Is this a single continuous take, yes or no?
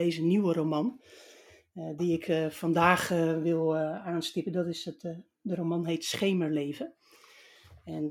yes